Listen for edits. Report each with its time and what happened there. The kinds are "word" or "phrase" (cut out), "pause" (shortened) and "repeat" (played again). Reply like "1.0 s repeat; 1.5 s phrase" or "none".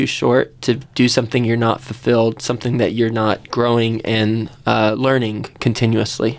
3.4 s pause

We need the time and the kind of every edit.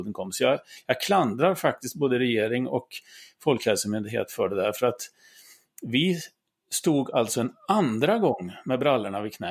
none

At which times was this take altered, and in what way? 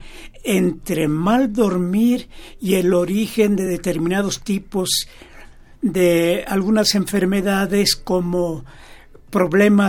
none

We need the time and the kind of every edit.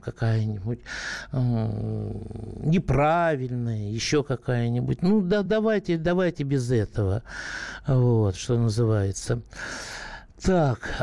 none

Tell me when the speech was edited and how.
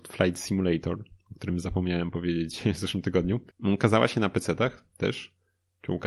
3.5 s pause

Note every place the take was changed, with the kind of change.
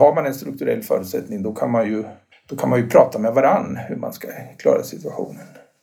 2.3 s pause

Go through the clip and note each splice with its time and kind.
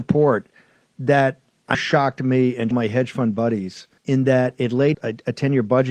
1.7 s word; 2.7 s phrase; 4.0 s pause; 4.9 s word

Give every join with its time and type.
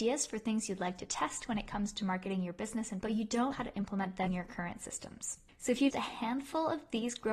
3.0 s word; 3.5 s word; 4.3 s word; 5.9 s word

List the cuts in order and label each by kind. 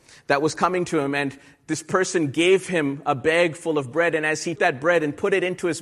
4.6 s word

